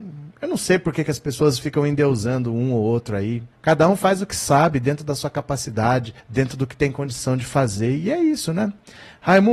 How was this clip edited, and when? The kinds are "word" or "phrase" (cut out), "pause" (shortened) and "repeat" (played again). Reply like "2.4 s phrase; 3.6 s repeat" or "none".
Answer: 3.5 s pause; 6.2 s pause